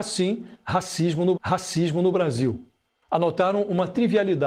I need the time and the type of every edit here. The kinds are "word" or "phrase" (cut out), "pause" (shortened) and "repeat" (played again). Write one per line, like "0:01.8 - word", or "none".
0:01.4 - repeat